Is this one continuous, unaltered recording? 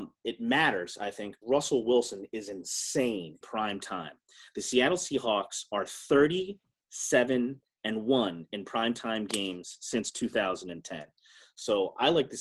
no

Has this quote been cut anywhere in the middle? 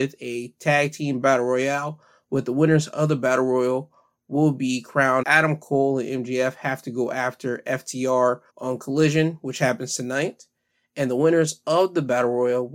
yes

